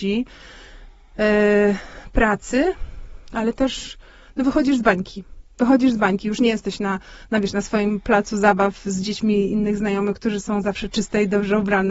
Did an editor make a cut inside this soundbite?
no; 0 cuts

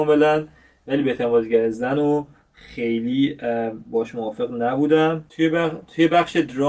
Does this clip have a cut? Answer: no; 0 cuts

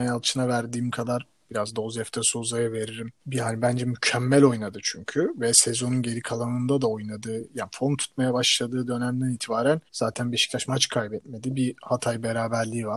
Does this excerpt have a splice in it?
yes; 2 cuts; at 3.2 s, 9.9 s

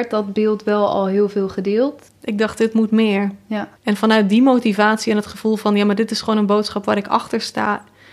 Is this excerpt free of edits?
no; 2 cuts; at 2.1 s, 3.8 s

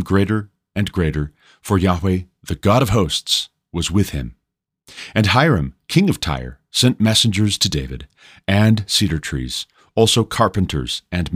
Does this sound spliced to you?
no; 0 cuts

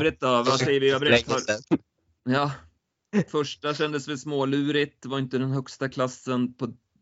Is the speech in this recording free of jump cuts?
yes; 0 cuts

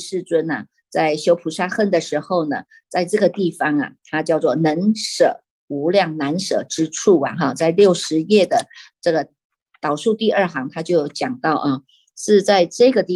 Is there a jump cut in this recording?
no; 0 cuts

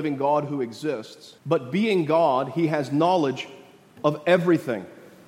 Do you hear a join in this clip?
yes; 1 cut; at 1.4 s

